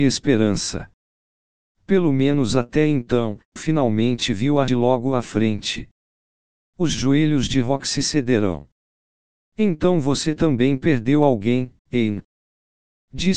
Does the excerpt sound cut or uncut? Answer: cut